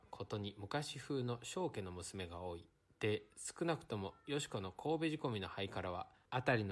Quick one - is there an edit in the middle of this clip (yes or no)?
no